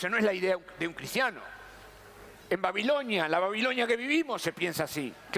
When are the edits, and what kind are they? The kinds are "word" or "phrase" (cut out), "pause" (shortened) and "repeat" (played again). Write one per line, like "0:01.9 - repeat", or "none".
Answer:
0:02.4 - pause